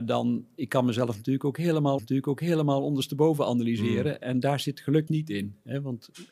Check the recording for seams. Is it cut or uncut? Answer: cut